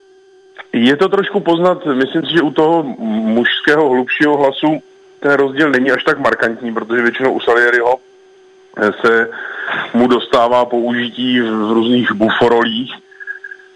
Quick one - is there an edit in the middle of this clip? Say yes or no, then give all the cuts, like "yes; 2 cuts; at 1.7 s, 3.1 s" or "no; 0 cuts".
no; 0 cuts